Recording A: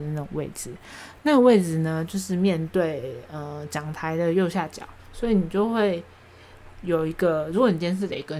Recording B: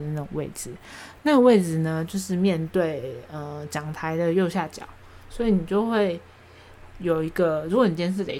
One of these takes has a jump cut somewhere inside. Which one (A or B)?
A